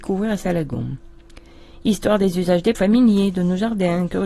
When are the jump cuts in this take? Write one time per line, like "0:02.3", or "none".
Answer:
0:02.7